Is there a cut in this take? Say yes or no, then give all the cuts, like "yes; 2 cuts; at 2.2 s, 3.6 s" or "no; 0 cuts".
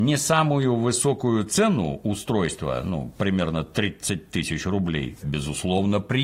yes; 1 cut; at 5.2 s